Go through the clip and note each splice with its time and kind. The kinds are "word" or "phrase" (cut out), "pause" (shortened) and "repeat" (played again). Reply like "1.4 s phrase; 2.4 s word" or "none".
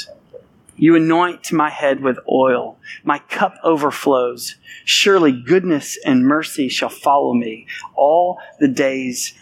none